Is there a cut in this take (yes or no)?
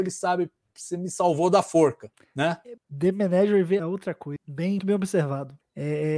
yes